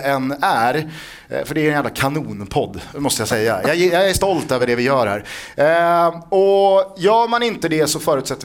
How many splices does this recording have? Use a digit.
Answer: 0